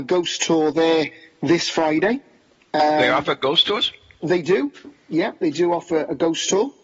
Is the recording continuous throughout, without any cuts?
yes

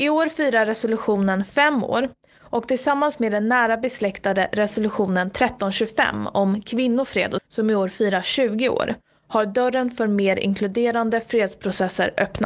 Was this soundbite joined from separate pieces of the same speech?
yes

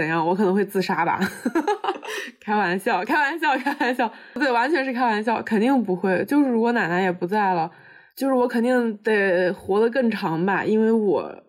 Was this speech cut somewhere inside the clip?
no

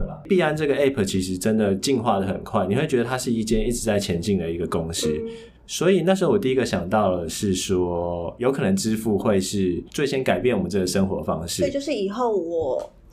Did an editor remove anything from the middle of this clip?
yes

